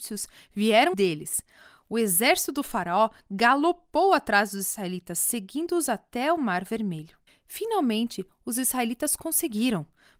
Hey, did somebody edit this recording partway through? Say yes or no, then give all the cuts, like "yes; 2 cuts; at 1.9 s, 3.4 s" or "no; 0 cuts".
yes; 2 cuts; at 0.9 s, 7.3 s